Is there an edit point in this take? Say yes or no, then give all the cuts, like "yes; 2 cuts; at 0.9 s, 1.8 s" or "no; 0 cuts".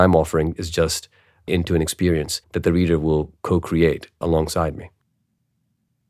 yes; 2 cuts; at 1.5 s, 2.4 s